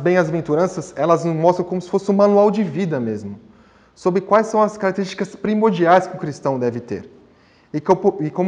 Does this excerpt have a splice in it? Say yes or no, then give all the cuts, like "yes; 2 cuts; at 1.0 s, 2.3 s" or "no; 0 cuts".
no; 0 cuts